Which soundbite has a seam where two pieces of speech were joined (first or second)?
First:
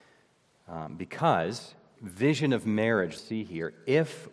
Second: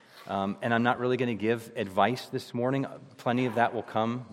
first